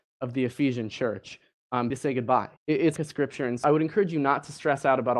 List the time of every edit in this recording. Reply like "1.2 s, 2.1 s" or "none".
1.9 s, 2.6 s, 3.0 s, 3.6 s